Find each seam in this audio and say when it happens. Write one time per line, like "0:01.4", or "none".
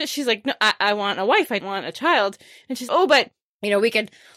0:01.6
0:02.9